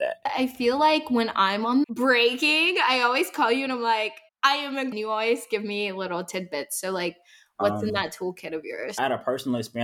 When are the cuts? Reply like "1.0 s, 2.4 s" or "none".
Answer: 1.8 s, 4.3 s, 4.9 s